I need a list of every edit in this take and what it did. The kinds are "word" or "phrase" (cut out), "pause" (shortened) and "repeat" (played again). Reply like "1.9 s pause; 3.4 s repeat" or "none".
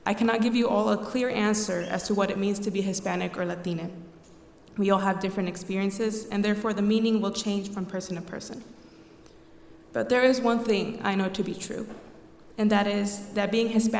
none